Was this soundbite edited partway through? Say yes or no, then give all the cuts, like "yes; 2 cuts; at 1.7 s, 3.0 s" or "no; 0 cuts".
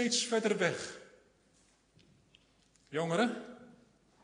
no; 0 cuts